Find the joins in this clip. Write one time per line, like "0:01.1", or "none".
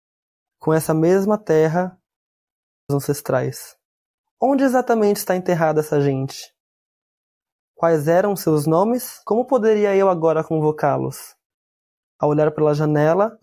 0:02.9
0:04.1